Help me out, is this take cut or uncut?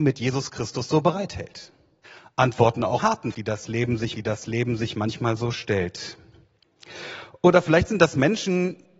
cut